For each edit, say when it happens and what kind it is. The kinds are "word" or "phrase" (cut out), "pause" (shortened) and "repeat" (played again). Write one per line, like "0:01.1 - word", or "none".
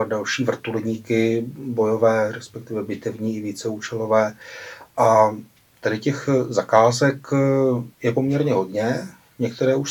0:07.9 - pause